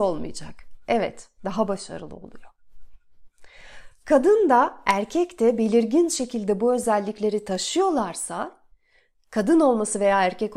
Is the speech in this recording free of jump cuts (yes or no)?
yes